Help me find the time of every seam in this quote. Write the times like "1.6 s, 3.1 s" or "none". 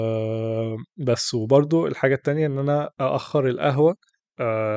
2.9 s